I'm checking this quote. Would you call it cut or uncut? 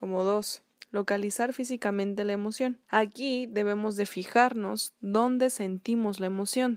cut